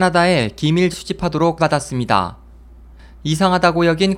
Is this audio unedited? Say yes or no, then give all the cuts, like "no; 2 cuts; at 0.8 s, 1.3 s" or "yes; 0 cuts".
no; 2 cuts; at 0.9 s, 1.6 s